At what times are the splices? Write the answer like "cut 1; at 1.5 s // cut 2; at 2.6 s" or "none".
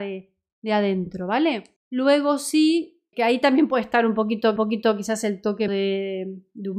cut 1; at 1.8 s // cut 2; at 3.1 s // cut 3; at 4.6 s // cut 4; at 5.7 s